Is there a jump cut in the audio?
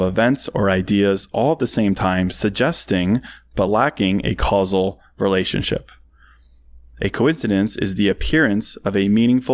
no; 0 cuts

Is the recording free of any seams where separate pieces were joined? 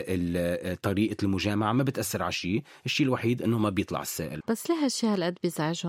no; 1 cut; at 4.4 s

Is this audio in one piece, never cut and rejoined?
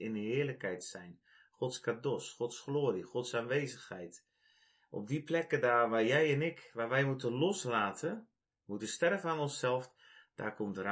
yes; 0 cuts

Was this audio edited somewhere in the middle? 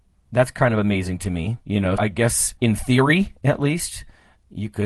yes; 2 cuts; at 2.0 s, 2.6 s

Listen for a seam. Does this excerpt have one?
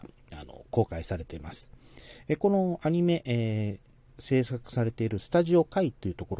no; 0 cuts

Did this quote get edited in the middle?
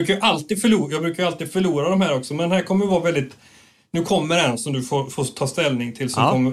no; 0 cuts

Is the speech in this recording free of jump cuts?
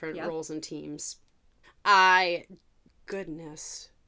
yes; 0 cuts

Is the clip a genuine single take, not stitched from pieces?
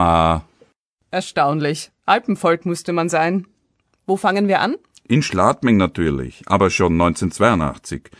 yes; 0 cuts

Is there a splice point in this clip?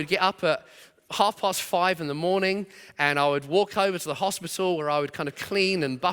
no; 0 cuts

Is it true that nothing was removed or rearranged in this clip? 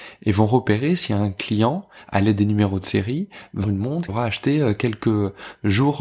no; 2 cuts; at 3.6 s, 4.1 s

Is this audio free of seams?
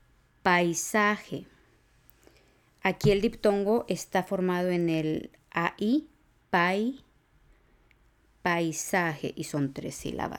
yes; 0 cuts

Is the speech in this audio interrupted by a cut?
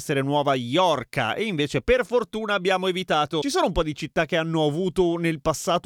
no; 0 cuts

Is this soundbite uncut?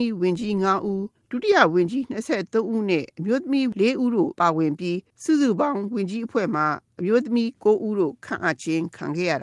no; 2 cuts; at 1.1 s, 5.1 s

